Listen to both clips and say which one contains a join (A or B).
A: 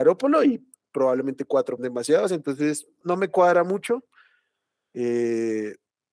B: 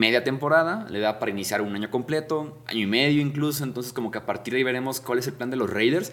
A